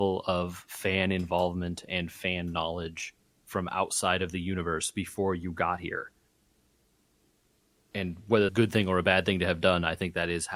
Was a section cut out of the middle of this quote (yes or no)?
yes